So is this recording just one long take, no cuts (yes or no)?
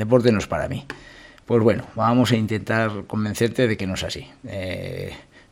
yes